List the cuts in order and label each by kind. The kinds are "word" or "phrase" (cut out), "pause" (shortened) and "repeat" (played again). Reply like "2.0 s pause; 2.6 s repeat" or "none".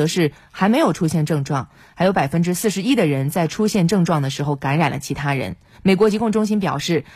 5.7 s pause

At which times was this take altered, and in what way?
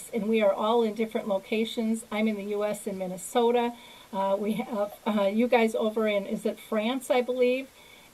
none

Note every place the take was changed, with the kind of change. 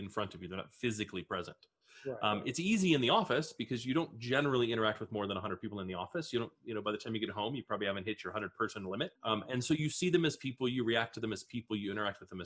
9.2 s pause

